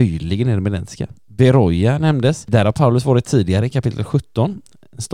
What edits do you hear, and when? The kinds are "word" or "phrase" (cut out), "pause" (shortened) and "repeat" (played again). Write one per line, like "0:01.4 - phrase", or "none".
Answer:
none